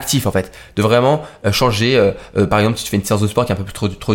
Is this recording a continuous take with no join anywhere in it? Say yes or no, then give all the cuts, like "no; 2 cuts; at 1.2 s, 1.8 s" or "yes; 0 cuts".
yes; 0 cuts